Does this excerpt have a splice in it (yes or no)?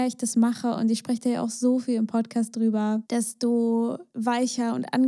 no